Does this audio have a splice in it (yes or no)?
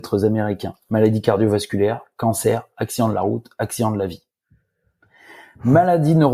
no